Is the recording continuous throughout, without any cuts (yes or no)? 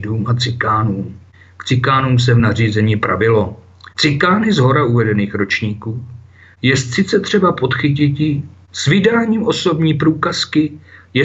yes